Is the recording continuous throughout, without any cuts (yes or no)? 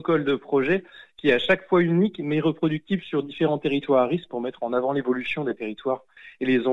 yes